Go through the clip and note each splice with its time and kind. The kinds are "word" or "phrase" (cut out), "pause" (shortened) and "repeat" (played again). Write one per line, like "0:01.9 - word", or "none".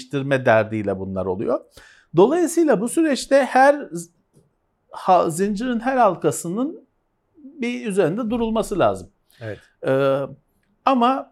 none

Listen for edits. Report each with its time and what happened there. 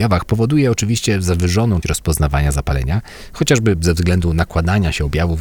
0:01.8 - word

